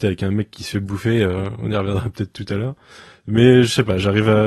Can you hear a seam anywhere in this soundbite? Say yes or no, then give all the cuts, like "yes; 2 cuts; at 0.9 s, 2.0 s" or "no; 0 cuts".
no; 0 cuts